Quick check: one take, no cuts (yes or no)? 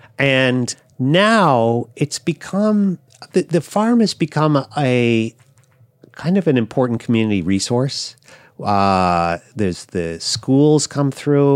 yes